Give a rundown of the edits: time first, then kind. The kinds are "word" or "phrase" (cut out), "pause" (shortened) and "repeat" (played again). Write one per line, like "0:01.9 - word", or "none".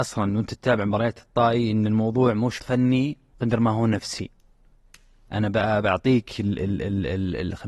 0:02.6 - word
0:03.3 - pause